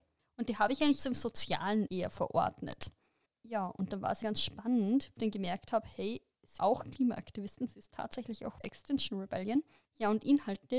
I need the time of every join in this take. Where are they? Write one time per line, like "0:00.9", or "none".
0:01.0
0:01.9
0:04.2
0:05.2
0:06.6
0:08.6